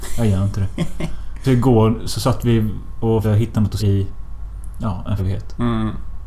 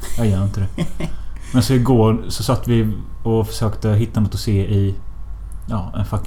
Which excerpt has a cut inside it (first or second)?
first